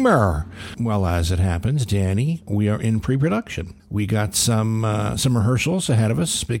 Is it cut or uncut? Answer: cut